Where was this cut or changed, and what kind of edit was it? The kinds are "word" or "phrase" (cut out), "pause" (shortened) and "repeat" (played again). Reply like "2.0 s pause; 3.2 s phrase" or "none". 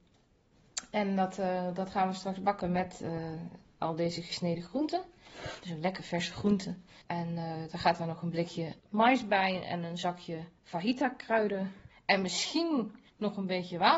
7.0 s pause; 8.8 s pause; 10.6 s pause; 11.9 s pause; 13.1 s pause